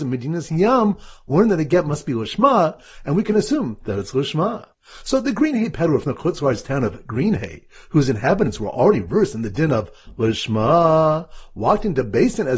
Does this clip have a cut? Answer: no; 0 cuts

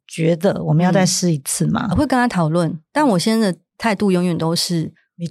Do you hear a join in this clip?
yes; 1 cut; at 1.9 s

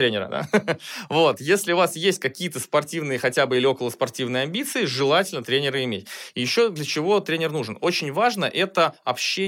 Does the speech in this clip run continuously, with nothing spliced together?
yes; 0 cuts

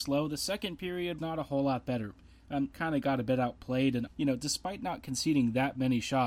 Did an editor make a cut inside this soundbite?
yes; 3 cuts; at 1.2 s, 2.7 s, 4.1 s

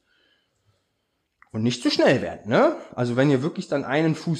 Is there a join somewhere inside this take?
no; 0 cuts

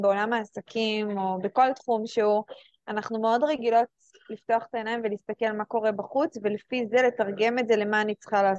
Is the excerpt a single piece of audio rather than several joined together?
yes; 0 cuts

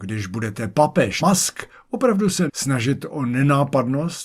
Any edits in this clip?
yes; 2 cuts; at 1.2 s, 2.5 s

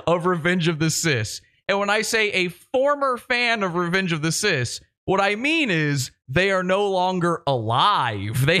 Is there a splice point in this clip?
no; 0 cuts

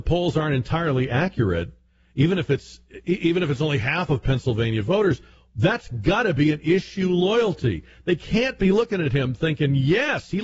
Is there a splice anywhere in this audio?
no; 0 cuts

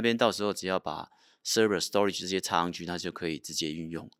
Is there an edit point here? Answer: no; 0 cuts

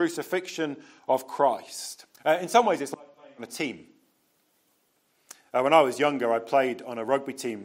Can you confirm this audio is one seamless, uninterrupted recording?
no; 1 cut; at 2.1 s

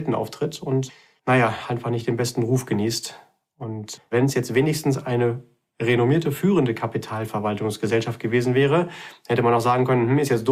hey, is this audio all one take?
yes; 0 cuts

